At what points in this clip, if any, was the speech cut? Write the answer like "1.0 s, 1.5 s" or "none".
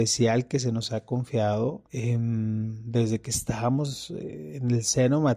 1.9 s